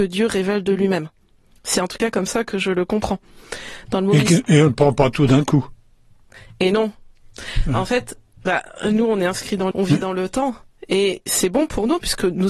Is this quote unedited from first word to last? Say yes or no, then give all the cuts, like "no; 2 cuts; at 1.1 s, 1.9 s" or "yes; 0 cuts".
no; 1 cut; at 9.7 s